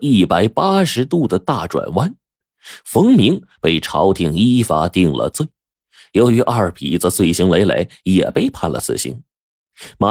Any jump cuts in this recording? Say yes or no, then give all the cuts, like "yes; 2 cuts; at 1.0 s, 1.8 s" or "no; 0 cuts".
no; 0 cuts